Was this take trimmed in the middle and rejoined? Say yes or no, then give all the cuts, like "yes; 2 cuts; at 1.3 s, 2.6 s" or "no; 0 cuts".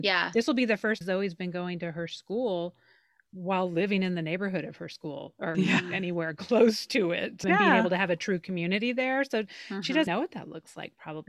yes; 4 cuts; at 1.0 s, 5.5 s, 7.4 s, 10.1 s